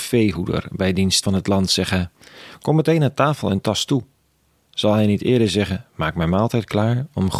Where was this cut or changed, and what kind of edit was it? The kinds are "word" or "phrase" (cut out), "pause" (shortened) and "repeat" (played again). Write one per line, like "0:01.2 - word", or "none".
0:01.2 - word